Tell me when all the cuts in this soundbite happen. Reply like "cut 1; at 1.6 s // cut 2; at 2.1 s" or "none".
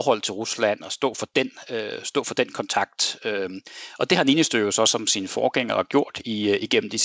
none